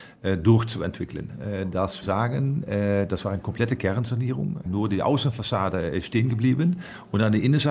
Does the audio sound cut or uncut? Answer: cut